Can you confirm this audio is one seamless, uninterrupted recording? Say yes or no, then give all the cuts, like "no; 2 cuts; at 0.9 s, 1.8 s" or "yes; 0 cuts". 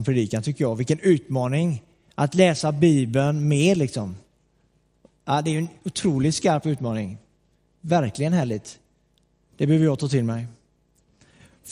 yes; 0 cuts